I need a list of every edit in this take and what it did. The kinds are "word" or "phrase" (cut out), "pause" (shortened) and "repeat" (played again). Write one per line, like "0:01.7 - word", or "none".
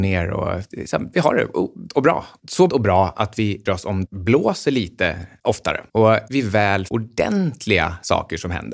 0:01.1 - word
0:01.9 - word
0:02.7 - word
0:03.7 - word
0:04.0 - word
0:06.3 - word
0:06.9 - word